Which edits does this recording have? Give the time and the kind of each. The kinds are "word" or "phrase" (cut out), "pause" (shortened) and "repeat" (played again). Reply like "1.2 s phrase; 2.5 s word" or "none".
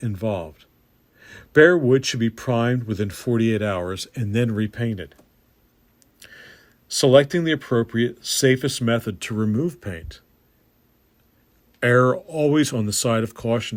none